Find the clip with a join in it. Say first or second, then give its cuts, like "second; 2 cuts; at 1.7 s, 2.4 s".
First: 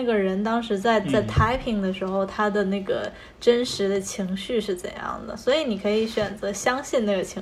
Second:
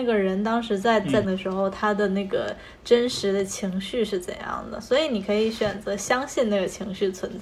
second; 1 cut; at 1.2 s